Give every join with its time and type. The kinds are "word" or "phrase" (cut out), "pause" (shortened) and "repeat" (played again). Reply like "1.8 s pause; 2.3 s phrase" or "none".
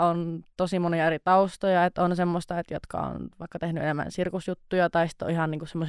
none